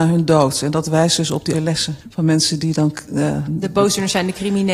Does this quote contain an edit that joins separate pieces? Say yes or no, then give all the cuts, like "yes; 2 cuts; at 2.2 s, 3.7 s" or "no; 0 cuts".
yes; 3 cuts; at 1.5 s, 2.0 s, 3.5 s